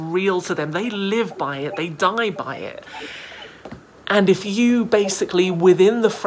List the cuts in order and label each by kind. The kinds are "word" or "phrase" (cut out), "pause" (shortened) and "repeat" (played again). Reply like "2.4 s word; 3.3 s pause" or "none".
none